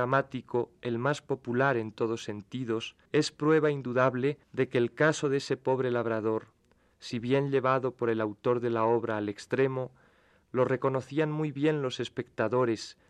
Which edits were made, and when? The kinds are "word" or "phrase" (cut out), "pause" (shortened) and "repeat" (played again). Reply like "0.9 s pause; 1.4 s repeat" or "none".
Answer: 3.1 s pause; 4.4 s pause